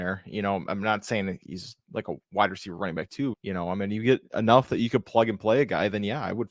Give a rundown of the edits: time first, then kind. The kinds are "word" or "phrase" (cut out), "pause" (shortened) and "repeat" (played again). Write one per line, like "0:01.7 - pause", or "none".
0:03.3 - word